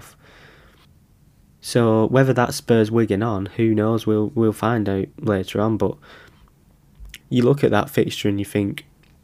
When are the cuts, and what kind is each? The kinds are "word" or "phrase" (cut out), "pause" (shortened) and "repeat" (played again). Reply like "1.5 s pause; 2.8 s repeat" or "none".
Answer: 5.1 s pause; 7.2 s pause